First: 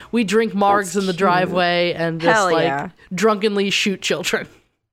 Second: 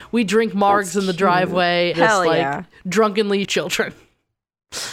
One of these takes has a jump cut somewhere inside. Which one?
second; 2 cuts; at 1.9 s, 3.4 s

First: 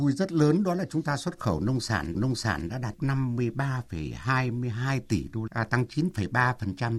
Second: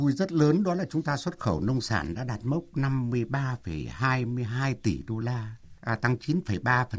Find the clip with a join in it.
first; 3 cuts; at 2.1 s, 2.9 s, 5.5 s

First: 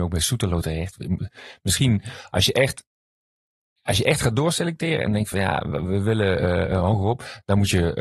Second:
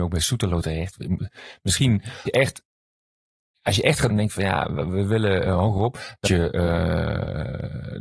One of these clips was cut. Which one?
second; 4 cuts; at 2.3 s, 4.1 s, 5.4 s, 6.2 s

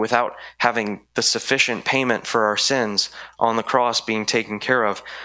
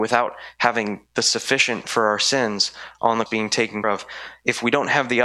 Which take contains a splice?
second; 3 cuts; at 1.8 s, 3.3 s, 3.8 s

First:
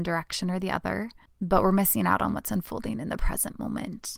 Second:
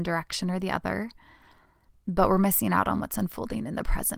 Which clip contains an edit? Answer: first; 1 cut; at 1.3 s

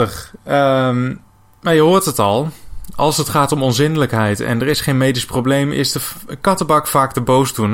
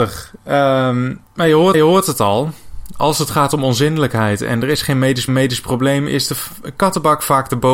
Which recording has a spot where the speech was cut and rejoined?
second; 3 cuts; at 1.3 s, 1.7 s, 5.3 s

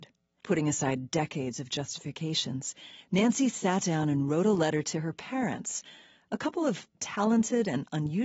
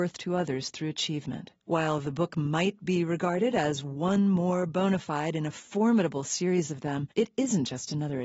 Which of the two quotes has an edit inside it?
second; 2 cuts; at 1.6 s, 7.1 s

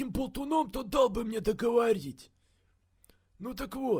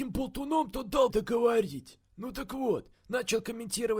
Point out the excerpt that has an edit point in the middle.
second; 3 cuts; at 1.1 s, 2.1 s, 2.9 s

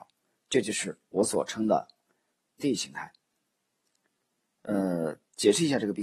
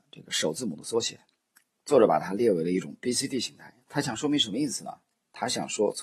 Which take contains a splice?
first; 1 cut; at 2.6 s

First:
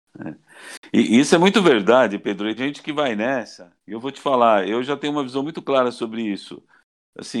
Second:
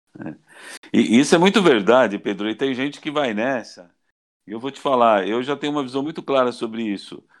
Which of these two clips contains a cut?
first; 2 cuts; at 2.6 s, 3.8 s

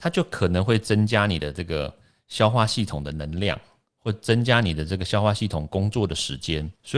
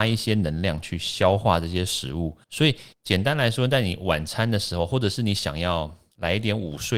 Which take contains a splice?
second; 2 cuts; at 2.4 s, 2.9 s

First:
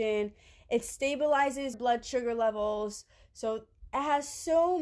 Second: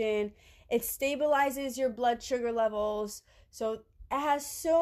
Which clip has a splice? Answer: first; 1 cut; at 1.7 s

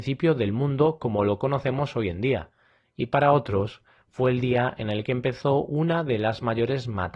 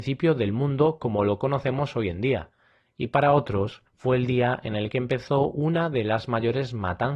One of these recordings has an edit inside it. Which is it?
second; 1 cut; at 3.9 s

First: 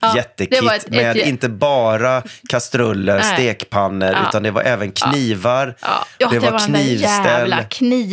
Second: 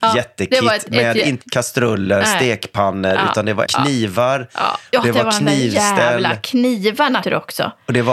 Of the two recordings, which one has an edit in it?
second; 3 cuts; at 1.4 s, 3.7 s, 7.2 s

